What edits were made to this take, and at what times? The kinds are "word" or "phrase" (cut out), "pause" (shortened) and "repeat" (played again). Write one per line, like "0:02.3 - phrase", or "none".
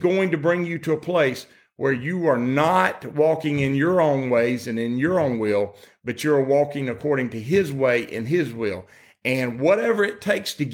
none